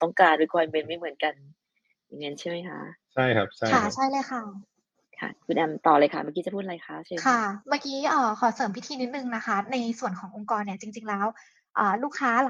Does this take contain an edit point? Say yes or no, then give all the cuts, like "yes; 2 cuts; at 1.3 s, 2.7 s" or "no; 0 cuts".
no; 0 cuts